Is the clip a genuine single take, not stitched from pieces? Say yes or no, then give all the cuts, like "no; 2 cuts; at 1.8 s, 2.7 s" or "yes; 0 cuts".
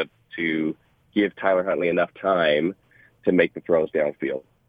yes; 0 cuts